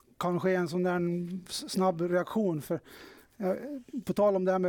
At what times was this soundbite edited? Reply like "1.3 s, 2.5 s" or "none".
none

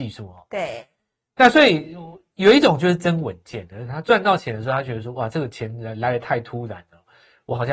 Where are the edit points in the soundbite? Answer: none

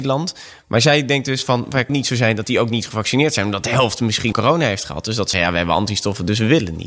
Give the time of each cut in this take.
1.9 s, 4.3 s, 5.3 s

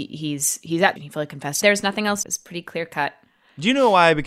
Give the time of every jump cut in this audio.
1.0 s, 1.6 s, 2.2 s

